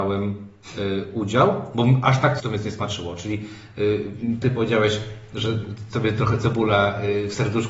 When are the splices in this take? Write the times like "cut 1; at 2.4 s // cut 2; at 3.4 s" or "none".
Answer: cut 1; at 2.4 s // cut 2; at 4.4 s